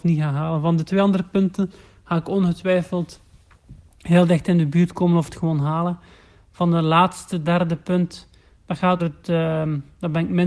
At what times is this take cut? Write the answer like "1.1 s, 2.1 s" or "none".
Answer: 9.0 s

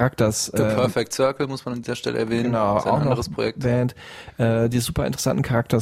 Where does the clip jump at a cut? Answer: none

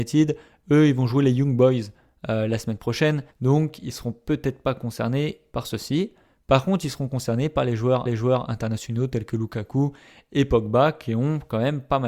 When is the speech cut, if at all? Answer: 3.3 s, 8.1 s

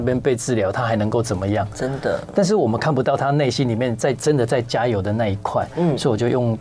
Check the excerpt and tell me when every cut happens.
none

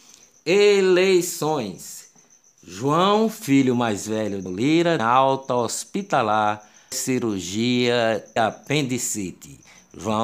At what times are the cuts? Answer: 4.5 s, 5.0 s, 6.9 s, 8.4 s

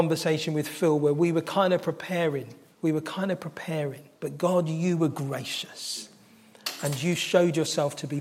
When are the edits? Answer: 2.7 s, 4.1 s

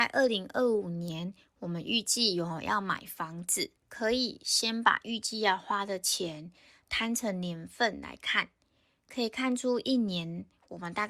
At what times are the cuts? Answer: none

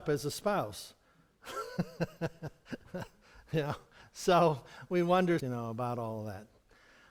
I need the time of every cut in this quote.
5.4 s

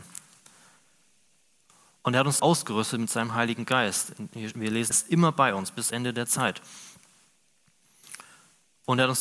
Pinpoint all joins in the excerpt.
2.4 s, 4.9 s, 5.9 s

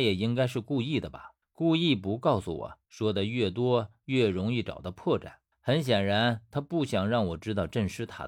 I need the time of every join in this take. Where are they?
1.4 s, 2.8 s, 5.5 s

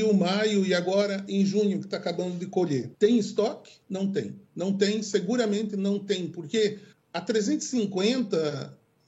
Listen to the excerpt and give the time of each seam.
2.9 s, 3.8 s, 4.5 s, 6.9 s

